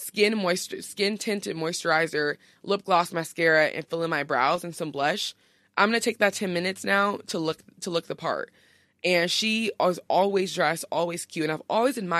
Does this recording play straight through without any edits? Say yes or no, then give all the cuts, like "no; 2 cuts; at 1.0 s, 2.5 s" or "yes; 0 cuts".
yes; 0 cuts